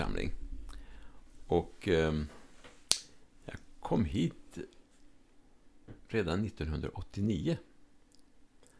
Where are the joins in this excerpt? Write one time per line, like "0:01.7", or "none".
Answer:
none